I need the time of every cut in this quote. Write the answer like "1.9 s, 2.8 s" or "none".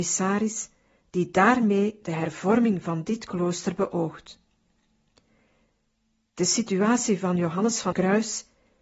7.9 s